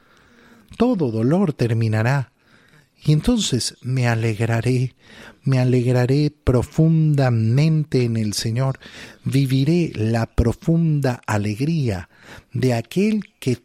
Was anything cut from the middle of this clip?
no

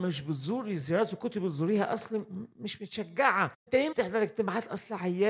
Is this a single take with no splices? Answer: no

